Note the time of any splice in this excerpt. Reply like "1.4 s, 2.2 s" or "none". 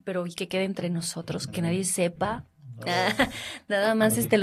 1.5 s